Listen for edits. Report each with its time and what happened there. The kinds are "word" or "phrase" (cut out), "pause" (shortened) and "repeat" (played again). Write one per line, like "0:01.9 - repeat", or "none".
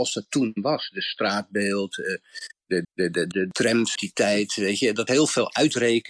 0:02.8 - repeat
0:03.3 - word
0:04.0 - word
0:05.1 - word